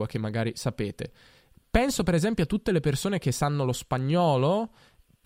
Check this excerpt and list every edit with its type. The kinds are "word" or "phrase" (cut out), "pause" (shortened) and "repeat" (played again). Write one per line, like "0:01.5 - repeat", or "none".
none